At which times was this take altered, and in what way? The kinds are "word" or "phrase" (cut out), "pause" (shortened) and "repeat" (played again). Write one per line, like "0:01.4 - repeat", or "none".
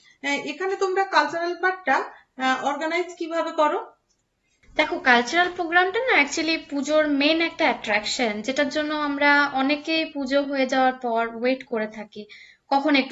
none